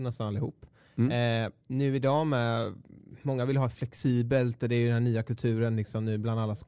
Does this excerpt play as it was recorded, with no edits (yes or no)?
no